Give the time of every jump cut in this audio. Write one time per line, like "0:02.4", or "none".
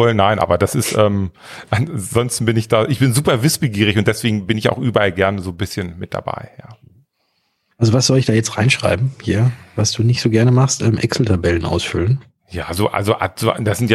none